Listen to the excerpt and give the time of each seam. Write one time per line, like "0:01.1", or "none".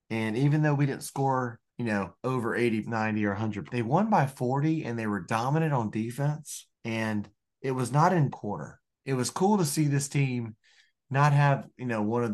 0:01.7
0:02.2
0:02.8
0:03.7
0:06.7
0:08.3
0:08.9